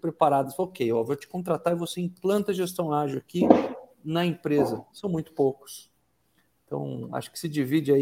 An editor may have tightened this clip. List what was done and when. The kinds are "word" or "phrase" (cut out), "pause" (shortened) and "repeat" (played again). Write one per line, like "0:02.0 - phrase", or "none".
none